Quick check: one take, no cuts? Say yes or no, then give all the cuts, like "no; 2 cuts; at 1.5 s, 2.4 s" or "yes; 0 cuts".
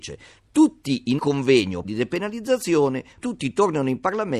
no; 3 cuts; at 1.2 s, 1.8 s, 3.2 s